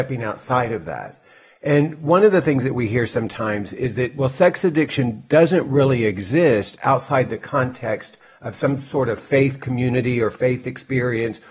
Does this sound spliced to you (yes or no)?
no